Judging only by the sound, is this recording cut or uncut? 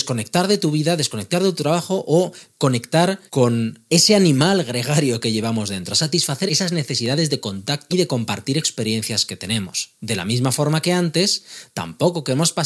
cut